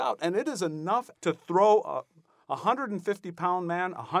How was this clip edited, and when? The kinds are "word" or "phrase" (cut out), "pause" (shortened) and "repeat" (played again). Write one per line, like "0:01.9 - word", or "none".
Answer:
0:01.2 - word